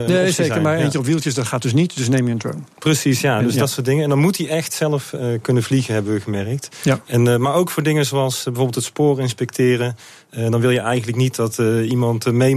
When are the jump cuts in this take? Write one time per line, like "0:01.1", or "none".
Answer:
none